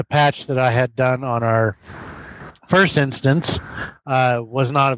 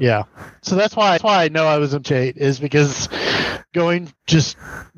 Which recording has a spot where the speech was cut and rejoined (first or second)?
second